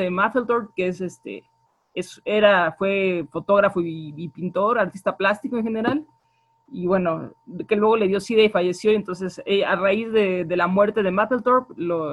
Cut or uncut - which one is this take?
uncut